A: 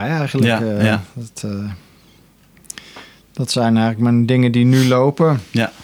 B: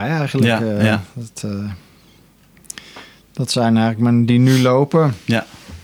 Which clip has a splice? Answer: B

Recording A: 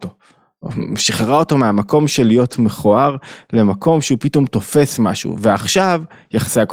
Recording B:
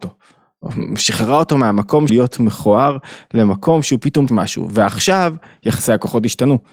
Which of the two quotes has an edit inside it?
B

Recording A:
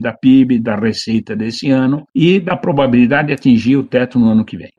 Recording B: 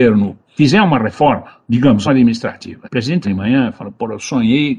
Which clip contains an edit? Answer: B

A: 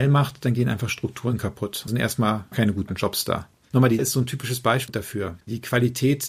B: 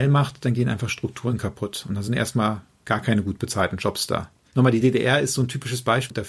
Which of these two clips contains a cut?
A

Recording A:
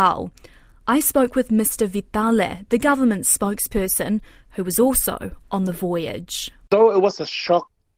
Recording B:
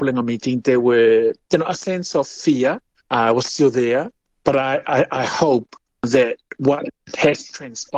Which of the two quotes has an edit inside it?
B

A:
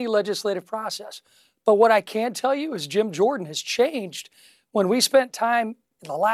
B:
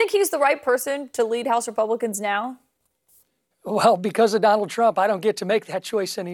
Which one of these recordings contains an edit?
B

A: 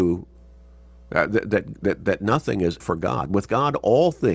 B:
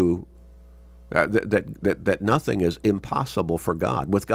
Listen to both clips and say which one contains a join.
A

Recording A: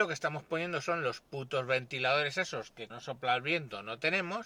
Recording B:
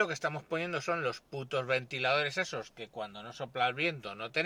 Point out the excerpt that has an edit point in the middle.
A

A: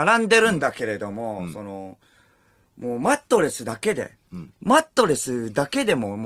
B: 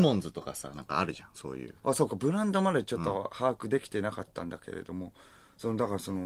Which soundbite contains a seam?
B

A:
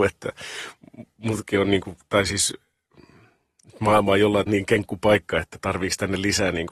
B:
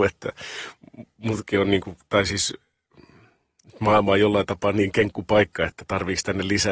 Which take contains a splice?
A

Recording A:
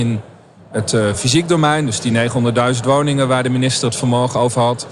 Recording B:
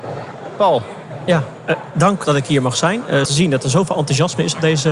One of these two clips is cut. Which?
B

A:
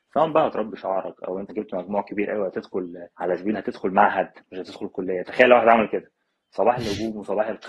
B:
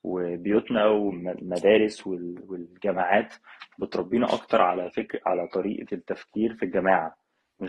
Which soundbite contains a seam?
A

